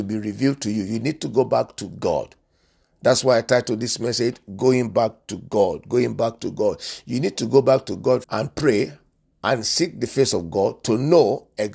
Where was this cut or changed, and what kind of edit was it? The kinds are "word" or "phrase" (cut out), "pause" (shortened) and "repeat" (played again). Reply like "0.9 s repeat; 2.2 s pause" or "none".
8.2 s word